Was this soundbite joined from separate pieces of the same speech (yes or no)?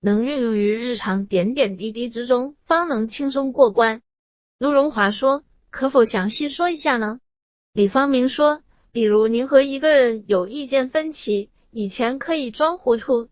no